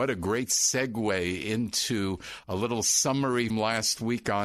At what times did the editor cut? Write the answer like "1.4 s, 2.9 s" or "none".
3.5 s